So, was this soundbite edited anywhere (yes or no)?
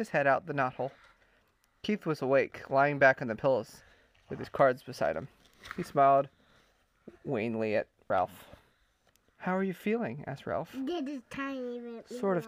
no